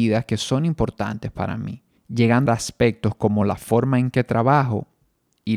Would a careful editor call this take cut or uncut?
cut